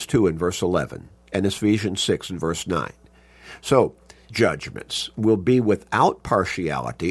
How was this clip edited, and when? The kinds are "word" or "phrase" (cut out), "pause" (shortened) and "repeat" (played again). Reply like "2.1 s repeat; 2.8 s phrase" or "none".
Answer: 4.3 s word